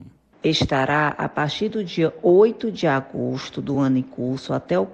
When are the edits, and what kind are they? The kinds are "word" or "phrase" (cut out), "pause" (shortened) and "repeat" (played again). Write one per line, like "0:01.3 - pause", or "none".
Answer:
none